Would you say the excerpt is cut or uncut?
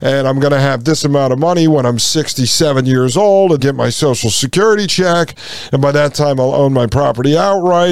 cut